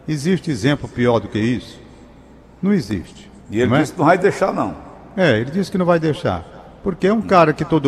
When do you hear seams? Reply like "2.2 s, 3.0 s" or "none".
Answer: 3.4 s